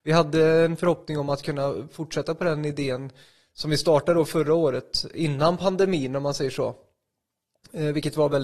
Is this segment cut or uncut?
uncut